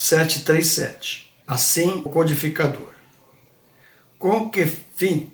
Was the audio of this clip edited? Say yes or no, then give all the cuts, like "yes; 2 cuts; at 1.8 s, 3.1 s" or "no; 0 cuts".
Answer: yes; 1 cut; at 2.1 s